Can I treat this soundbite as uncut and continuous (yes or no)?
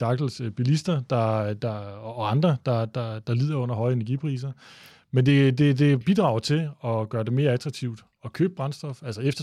yes